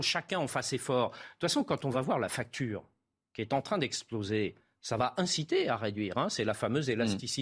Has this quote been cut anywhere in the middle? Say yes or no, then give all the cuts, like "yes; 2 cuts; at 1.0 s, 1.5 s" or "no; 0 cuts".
no; 0 cuts